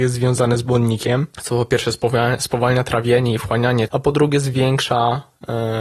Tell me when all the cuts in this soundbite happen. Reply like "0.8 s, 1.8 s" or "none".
1.3 s, 3.9 s